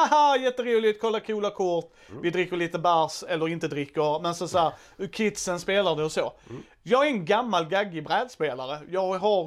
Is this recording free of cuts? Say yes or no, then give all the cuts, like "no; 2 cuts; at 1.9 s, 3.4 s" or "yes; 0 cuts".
yes; 0 cuts